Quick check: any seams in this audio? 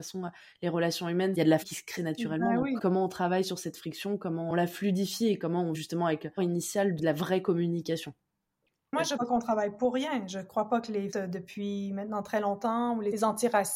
yes; 6 cuts; at 1.6 s, 2.0 s, 5.7 s, 6.4 s, 9.2 s, 11.1 s

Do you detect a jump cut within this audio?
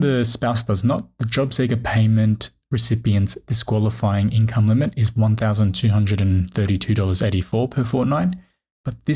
no; 0 cuts

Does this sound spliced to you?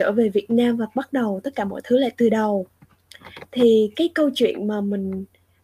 no; 0 cuts

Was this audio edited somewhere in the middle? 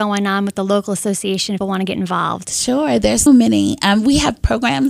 yes; 2 cuts; at 1.6 s, 3.3 s

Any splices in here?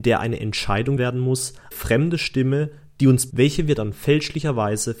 yes; 3 cuts; at 1.0 s, 1.7 s, 3.3 s

